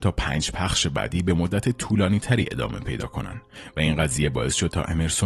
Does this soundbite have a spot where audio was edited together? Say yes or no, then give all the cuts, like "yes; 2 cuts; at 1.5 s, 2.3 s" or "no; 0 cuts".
no; 0 cuts